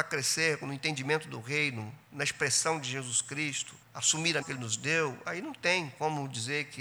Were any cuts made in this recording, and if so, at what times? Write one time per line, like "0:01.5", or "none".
0:03.8
0:04.4

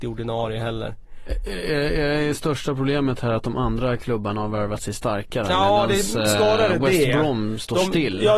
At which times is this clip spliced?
none

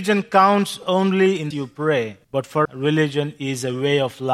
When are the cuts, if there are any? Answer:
0:01.5
0:02.2
0:02.6

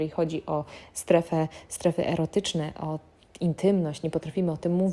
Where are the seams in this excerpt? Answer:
none

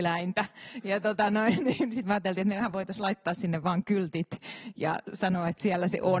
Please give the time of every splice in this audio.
none

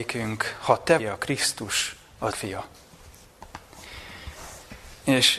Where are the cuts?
0:01.0
0:02.3

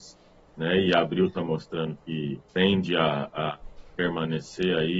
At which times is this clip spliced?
0:02.5

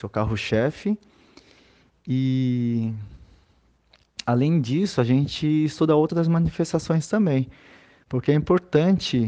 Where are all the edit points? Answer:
none

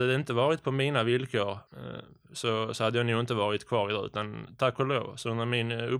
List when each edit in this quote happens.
0:01.7

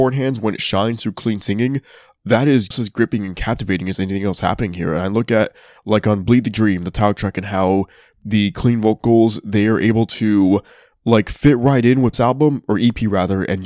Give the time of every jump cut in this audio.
0:02.7
0:12.1

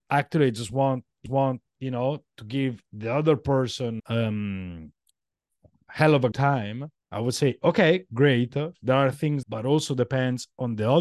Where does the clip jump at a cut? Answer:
0:01.3
0:04.0
0:06.3
0:07.0
0:09.4

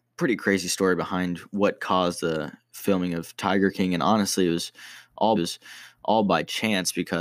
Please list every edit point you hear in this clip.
0:05.4

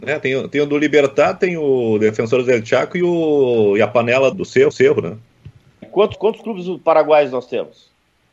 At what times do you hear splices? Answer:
0:04.3
0:04.7
0:05.8
0:06.1

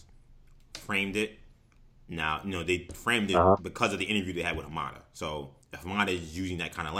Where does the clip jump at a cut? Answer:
0:05.6

